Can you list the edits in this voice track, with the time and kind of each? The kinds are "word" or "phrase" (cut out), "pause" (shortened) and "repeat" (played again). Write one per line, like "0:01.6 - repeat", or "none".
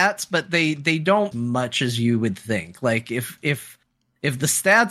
0:01.3 - phrase